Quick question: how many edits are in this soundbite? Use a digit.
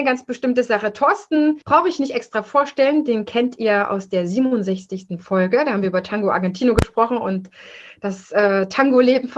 1